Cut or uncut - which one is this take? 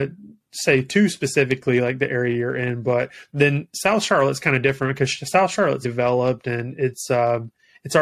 cut